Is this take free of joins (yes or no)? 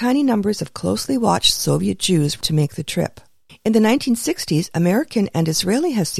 no